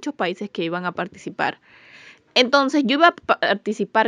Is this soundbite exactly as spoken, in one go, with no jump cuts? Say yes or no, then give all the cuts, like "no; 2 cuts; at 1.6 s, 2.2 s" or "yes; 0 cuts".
yes; 0 cuts